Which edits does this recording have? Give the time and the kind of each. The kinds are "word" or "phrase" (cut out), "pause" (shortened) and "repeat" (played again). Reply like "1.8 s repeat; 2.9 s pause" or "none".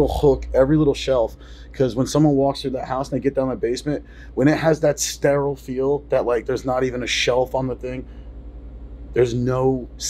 none